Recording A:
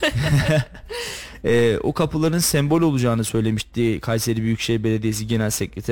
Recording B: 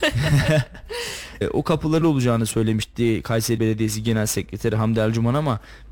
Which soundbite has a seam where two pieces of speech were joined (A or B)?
B